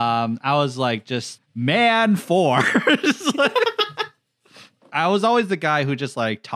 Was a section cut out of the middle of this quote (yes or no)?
yes